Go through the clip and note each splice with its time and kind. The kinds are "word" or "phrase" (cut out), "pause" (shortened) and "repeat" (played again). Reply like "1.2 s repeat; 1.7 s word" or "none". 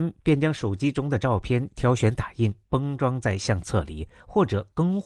2.6 s pause

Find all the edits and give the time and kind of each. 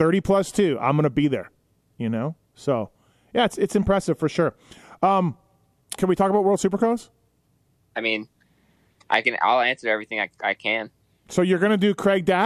6.0 s word

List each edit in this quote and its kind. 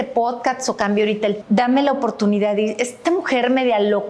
1.4 s word; 3.0 s word

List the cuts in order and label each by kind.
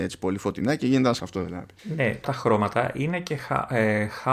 1.2 s word; 1.8 s pause; 2.2 s phrase

